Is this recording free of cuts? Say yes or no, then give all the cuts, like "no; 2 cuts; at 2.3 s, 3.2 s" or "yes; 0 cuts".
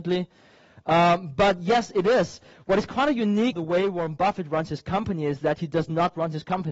no; 1 cut; at 3.5 s